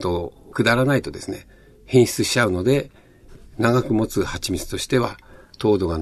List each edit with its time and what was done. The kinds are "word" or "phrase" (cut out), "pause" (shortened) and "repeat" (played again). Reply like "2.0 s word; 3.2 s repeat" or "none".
none

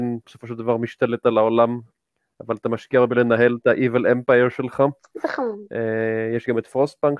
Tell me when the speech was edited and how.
none

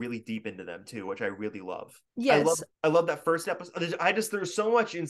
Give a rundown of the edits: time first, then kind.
2.1 s pause; 2.7 s pause

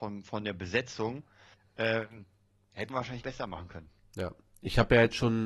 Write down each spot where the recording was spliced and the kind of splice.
1.5 s pause; 2.9 s word; 3.2 s word

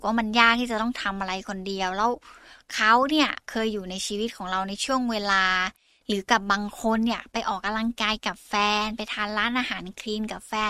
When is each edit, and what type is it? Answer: none

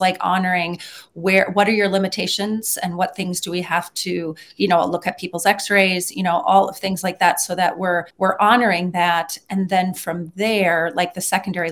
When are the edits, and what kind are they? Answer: 8.1 s pause

